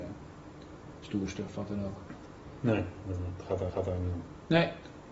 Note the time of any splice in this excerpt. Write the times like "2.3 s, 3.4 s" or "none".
3.7 s